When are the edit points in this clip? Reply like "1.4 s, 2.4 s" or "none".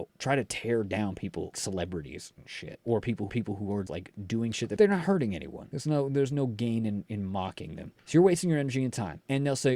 1.5 s, 3.3 s, 3.9 s, 4.8 s, 8.0 s